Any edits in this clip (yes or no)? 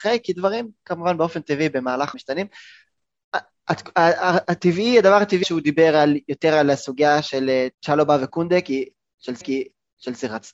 yes